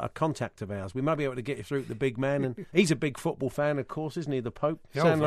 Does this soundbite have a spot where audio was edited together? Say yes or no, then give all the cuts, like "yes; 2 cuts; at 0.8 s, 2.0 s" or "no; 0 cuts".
yes; 1 cut; at 2.7 s